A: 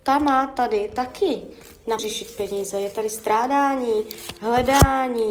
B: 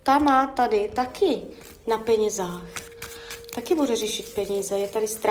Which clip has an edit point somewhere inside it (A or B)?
A